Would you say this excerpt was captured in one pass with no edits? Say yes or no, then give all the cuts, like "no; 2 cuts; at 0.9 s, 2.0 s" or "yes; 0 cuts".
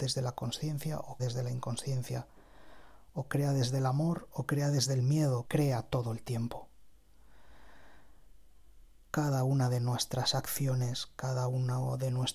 no; 2 cuts; at 1.2 s, 5.5 s